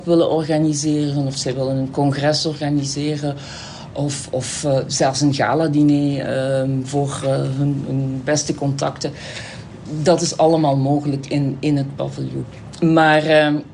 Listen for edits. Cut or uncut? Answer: uncut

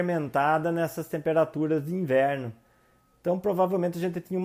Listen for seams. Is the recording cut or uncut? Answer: uncut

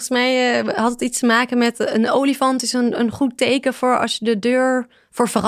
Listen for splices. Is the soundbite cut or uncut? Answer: uncut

